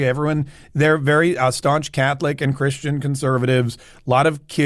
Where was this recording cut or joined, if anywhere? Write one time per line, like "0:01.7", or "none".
none